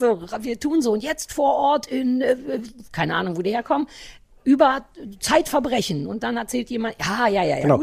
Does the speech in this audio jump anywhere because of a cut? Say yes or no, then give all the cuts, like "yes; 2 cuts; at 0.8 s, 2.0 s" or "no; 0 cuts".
no; 0 cuts